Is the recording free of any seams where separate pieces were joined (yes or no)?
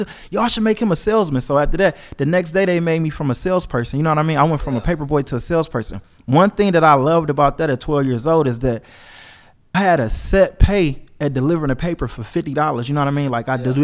no